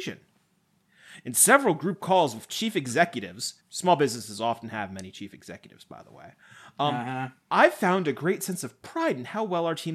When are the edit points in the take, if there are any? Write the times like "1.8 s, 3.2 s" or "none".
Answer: 3.6 s